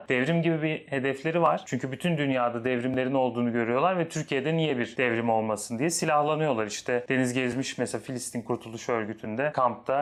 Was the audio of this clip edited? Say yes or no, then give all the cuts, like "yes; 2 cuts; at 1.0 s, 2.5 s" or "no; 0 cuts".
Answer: no; 0 cuts